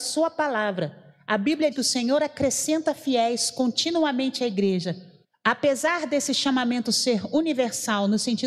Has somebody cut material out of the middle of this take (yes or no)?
yes